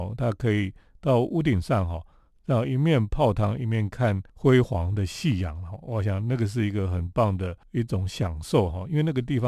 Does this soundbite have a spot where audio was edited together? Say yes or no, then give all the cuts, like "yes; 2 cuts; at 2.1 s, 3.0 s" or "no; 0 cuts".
no; 0 cuts